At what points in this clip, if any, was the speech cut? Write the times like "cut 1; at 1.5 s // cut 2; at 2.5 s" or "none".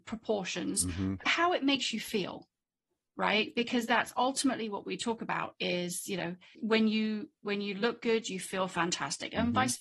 cut 1; at 6.5 s